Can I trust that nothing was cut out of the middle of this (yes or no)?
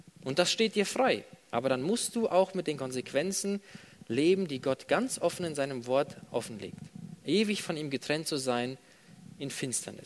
yes